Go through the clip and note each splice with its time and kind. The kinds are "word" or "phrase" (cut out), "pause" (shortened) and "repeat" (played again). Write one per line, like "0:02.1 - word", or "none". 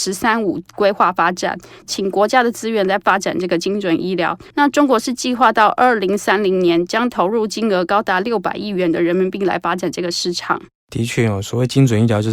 0:04.5 - pause